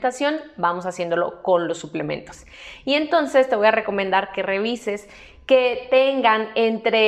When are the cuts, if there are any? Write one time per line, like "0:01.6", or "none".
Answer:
none